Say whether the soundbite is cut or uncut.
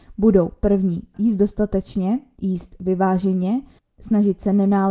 cut